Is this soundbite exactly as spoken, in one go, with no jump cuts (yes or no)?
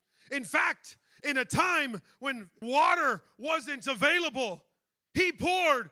no